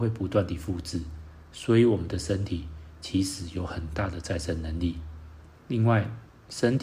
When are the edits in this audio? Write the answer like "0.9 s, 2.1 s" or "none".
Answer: 5.5 s